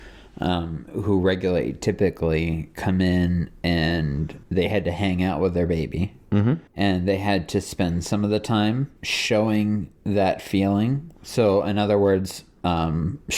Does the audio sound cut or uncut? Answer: cut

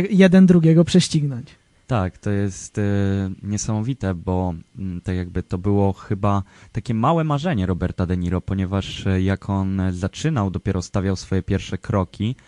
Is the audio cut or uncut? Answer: uncut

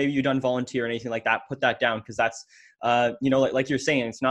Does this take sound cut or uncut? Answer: uncut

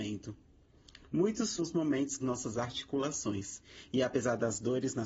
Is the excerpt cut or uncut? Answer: cut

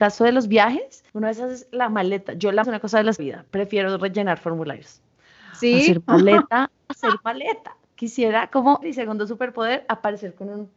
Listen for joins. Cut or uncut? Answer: cut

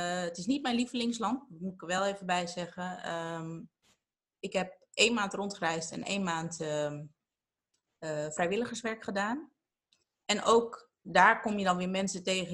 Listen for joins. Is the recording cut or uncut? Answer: uncut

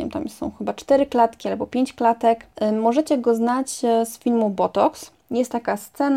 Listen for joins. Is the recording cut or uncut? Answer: cut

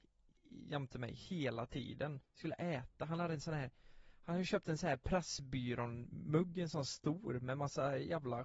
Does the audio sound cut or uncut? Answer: cut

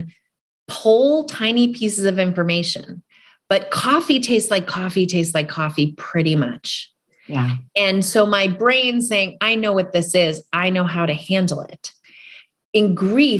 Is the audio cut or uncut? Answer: uncut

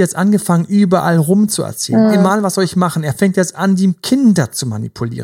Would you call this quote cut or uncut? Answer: uncut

